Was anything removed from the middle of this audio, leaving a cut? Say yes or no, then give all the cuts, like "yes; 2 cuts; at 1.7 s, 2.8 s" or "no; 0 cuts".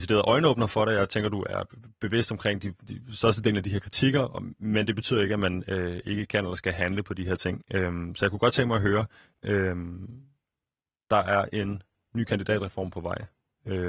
no; 0 cuts